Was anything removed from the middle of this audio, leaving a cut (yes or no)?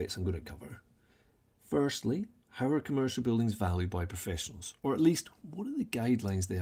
no